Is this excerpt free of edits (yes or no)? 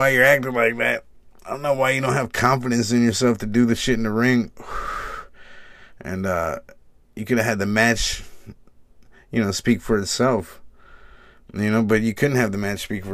yes